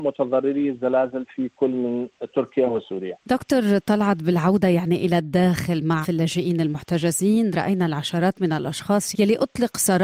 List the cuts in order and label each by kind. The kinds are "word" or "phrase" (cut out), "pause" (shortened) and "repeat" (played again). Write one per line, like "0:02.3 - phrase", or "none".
0:06.0 - word
0:09.1 - word